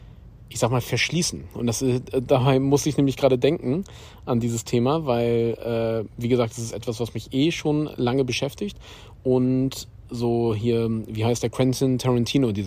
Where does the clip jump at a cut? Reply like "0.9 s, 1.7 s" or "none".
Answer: none